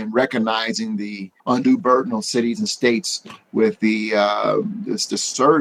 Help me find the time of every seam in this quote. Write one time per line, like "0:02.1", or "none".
0:01.4